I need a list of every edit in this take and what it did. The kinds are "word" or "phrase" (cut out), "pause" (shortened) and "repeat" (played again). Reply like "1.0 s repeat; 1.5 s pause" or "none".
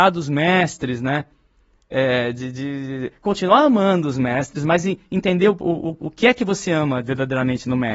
none